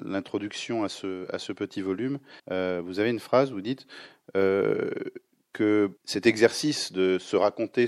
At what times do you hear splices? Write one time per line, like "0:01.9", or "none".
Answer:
0:02.4
0:06.0